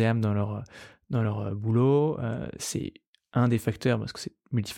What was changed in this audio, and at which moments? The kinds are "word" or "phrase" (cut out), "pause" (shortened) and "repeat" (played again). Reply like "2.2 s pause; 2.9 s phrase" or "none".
none